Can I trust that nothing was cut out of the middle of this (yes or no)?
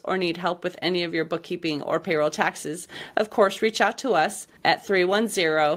no